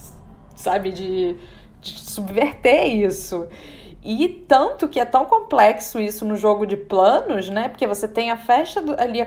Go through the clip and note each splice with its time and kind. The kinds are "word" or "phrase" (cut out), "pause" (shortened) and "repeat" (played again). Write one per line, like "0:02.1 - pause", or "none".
none